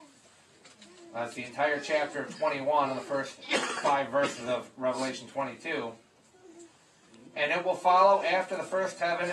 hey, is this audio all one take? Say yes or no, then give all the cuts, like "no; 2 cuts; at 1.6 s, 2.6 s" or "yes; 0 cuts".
yes; 0 cuts